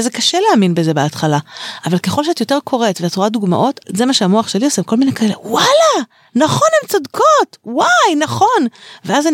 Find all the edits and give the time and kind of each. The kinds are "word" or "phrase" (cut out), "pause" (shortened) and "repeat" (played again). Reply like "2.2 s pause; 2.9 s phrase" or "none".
none